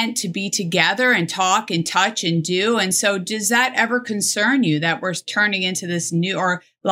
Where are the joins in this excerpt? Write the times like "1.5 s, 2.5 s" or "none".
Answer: none